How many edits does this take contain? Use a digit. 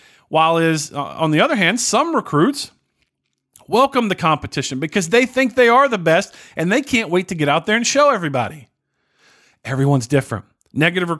0